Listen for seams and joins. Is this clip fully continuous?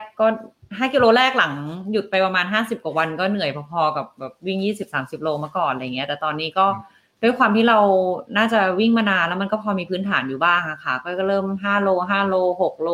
yes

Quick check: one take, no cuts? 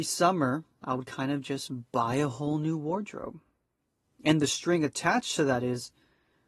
yes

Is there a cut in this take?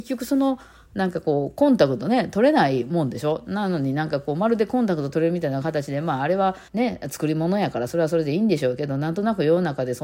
yes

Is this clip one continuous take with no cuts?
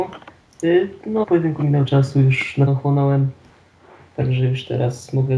no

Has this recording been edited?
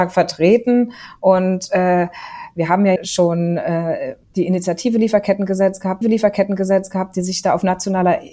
yes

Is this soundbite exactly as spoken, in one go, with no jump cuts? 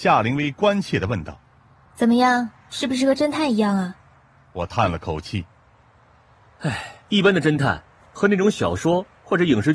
no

